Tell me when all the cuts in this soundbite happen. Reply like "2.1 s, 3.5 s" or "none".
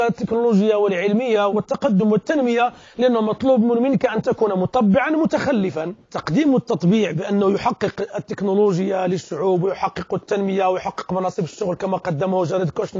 none